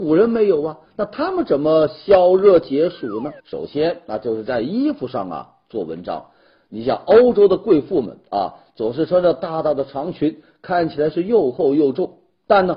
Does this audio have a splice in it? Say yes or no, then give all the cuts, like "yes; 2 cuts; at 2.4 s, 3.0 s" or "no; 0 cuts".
yes; 1 cut; at 3.4 s